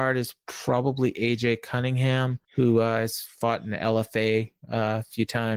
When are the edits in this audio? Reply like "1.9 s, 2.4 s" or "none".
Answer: 2.4 s